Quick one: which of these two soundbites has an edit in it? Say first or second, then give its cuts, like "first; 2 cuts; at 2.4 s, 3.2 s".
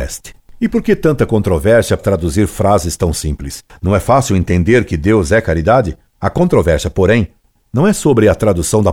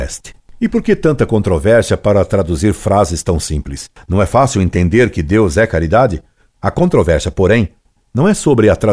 first; 2 cuts; at 2.0 s, 6.1 s